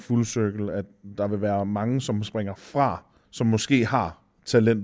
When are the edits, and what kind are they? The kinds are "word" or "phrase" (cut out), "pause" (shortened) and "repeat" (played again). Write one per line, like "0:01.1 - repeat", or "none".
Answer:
0:03.2 - pause